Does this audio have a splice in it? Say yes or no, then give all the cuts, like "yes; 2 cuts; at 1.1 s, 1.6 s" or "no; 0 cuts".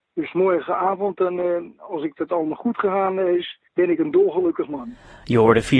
yes; 1 cut; at 3.7 s